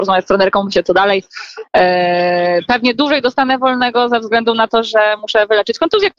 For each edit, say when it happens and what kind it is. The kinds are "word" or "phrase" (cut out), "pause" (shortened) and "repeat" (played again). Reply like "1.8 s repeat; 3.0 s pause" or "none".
none